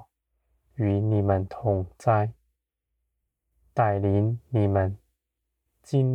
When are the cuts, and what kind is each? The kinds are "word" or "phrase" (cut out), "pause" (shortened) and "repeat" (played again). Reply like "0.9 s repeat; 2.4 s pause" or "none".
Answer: none